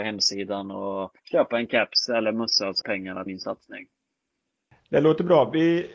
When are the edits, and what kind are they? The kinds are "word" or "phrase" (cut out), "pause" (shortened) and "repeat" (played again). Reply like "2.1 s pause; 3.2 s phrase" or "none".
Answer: 1.2 s pause; 2.8 s word; 3.3 s word